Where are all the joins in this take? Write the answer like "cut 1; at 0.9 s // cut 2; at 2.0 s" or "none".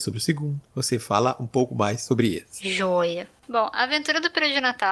none